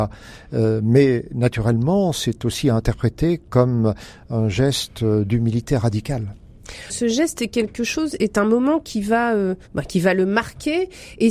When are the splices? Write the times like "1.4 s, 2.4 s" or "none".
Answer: 9.6 s